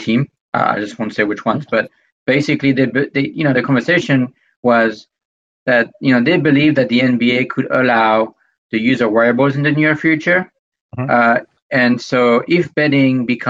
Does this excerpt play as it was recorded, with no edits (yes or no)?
yes